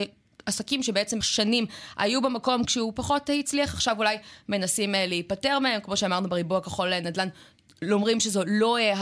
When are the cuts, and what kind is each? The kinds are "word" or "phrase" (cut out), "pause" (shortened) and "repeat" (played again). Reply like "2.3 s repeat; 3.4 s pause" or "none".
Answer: 1.2 s word